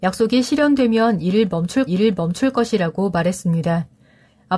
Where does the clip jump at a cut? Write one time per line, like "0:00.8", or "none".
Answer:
0:01.9